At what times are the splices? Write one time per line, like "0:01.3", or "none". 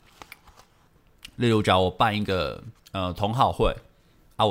0:02.8